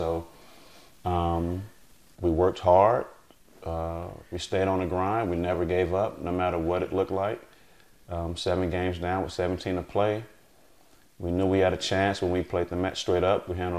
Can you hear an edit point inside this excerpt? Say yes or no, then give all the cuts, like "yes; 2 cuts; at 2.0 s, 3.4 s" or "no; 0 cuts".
no; 0 cuts